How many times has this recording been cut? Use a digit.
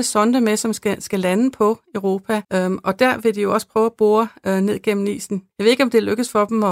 2